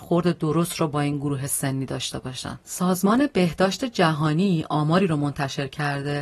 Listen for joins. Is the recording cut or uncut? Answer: uncut